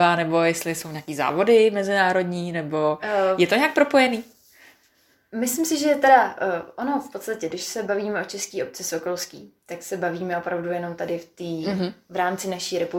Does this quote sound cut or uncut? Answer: uncut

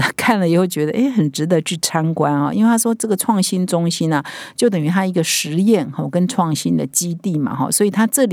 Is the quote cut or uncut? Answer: uncut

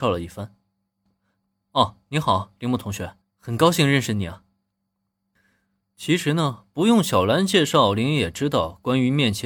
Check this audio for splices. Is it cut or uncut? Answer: cut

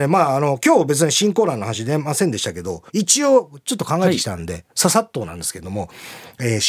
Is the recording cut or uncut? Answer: cut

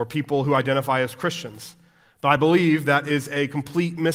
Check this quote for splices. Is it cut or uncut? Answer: uncut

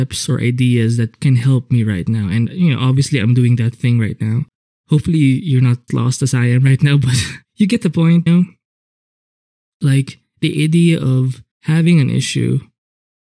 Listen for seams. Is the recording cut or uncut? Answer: cut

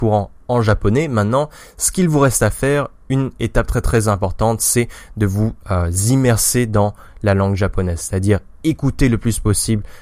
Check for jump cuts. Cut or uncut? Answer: uncut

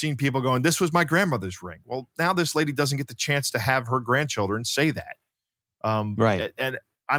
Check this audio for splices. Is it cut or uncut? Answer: uncut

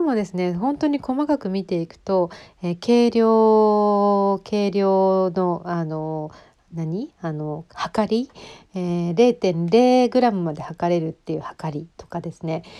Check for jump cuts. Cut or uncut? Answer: uncut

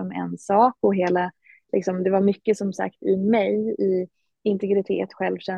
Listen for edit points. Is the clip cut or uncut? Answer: uncut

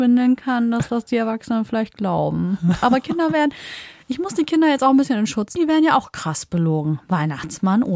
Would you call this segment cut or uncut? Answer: cut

